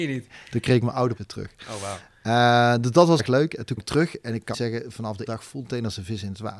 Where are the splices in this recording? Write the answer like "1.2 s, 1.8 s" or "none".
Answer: 1.2 s, 3.2 s, 3.8 s, 4.5 s, 5.3 s, 5.6 s